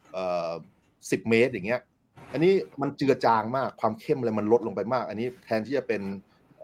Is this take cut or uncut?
cut